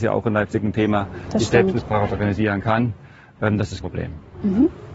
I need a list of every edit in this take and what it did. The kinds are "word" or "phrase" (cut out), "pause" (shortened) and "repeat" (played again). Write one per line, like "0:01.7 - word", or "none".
0:03.8 - word